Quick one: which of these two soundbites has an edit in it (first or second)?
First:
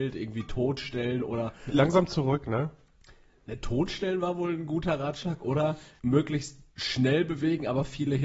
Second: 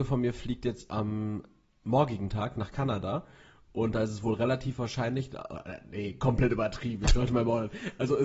first